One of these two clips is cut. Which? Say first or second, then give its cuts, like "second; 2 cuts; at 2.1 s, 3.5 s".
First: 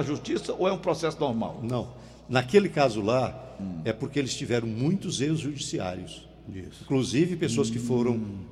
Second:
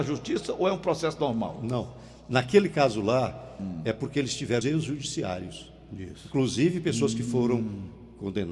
second; 1 cut; at 4.6 s